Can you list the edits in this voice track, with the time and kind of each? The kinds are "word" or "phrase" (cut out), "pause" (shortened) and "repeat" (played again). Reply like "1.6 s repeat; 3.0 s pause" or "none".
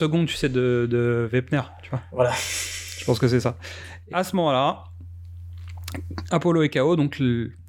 4.1 s word